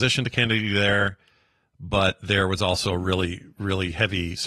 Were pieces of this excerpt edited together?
no; 0 cuts

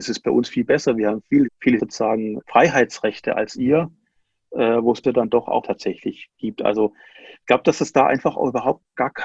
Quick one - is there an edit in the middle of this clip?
yes; 5 cuts; at 1.5 s, 1.8 s, 2.4 s, 5.0 s, 5.6 s

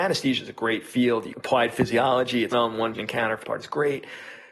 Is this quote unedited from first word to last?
no; 4 cuts; at 1.3 s, 2.5 s, 2.9 s, 3.4 s

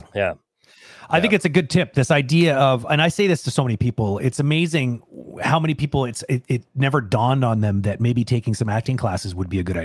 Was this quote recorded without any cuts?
yes; 0 cuts

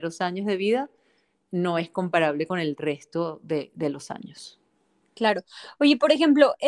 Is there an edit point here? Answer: no; 0 cuts

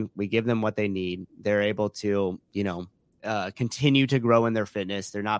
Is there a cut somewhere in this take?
no; 0 cuts

